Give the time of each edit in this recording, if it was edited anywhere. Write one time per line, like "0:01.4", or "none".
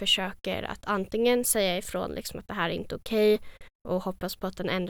none